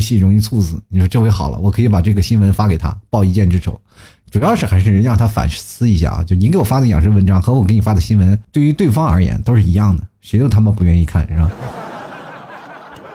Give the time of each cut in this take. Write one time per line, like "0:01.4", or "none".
none